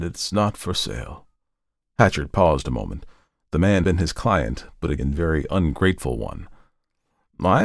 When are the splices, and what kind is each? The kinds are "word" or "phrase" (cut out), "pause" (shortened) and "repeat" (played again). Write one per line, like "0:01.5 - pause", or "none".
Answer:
0:03.8 - word
0:05.0 - word